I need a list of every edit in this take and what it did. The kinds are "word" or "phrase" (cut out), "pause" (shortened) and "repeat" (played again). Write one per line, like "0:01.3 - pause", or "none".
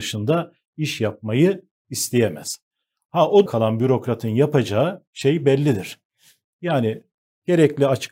0:03.5 - word